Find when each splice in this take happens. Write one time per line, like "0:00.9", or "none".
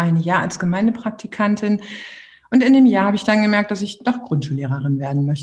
none